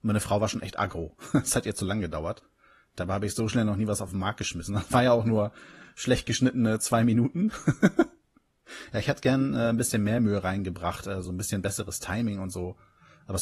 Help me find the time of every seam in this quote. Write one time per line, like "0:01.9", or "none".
none